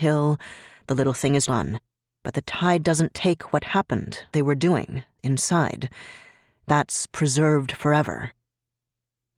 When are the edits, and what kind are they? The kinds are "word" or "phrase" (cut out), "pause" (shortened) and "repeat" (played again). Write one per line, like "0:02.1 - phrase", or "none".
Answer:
0:01.5 - word
0:04.3 - word
0:05.2 - word